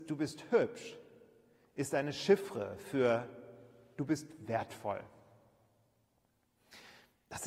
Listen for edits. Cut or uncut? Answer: uncut